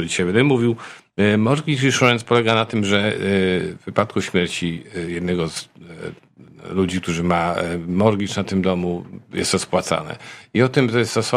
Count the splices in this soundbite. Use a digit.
0